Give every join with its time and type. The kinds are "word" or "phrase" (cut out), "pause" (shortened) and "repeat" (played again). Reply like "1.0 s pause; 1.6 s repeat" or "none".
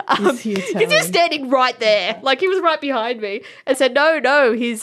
3.7 s phrase